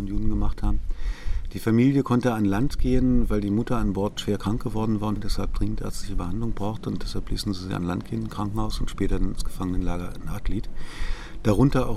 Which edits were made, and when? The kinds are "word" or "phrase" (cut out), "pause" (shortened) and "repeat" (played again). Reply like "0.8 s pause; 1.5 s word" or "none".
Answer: none